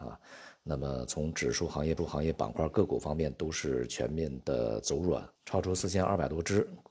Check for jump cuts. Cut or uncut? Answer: cut